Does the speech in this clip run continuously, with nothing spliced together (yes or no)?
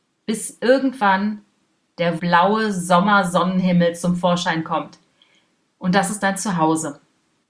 no